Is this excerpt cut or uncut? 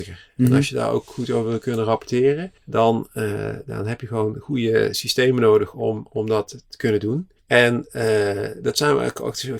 cut